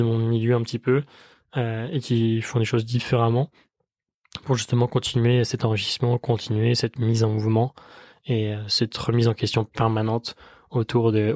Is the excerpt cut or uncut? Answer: uncut